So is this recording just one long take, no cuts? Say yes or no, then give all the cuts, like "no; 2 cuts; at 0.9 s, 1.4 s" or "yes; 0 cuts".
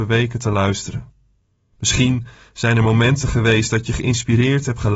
yes; 0 cuts